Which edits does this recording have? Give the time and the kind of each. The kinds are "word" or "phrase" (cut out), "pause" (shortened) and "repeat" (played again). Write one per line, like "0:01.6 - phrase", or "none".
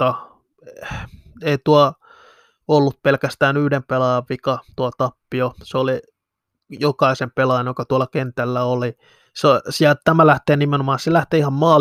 none